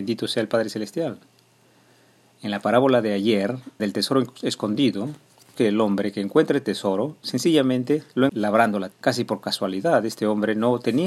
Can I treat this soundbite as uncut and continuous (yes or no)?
no